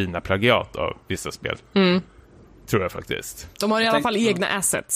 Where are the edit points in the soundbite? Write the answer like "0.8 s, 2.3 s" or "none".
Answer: 1.6 s, 3.5 s